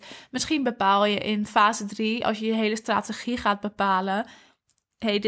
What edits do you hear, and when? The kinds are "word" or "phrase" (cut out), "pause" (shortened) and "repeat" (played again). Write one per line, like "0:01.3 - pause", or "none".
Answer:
none